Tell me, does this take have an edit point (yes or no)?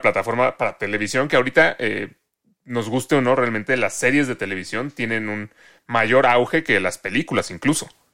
no